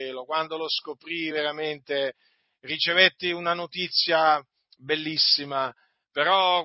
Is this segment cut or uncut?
uncut